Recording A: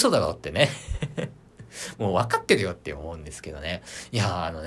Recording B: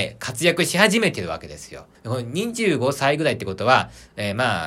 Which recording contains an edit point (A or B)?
B